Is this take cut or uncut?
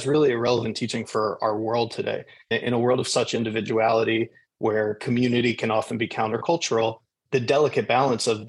uncut